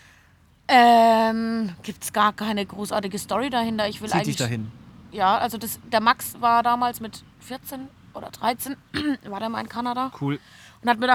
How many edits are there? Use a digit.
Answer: 1